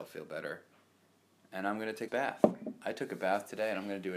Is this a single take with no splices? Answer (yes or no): no